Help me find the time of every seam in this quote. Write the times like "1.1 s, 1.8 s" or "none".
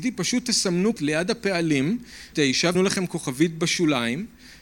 1.0 s, 2.3 s, 2.7 s